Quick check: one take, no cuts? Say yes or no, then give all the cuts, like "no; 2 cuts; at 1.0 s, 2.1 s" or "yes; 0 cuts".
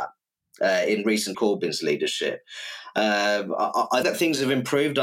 no; 2 cuts; at 1.3 s, 4.0 s